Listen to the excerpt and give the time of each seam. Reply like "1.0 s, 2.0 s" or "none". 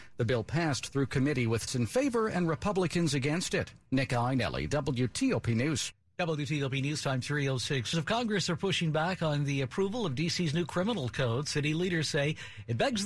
1.7 s, 7.9 s